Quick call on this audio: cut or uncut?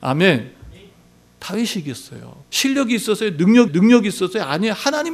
cut